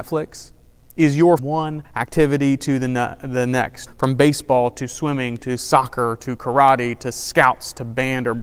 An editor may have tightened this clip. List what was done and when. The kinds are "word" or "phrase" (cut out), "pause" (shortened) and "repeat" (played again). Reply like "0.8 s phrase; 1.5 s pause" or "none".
1.4 s phrase; 1.8 s pause; 3.9 s word